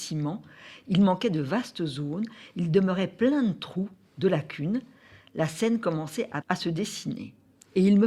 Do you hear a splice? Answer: yes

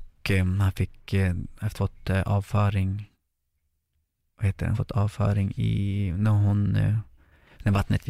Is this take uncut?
no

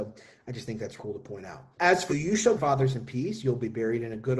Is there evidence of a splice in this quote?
yes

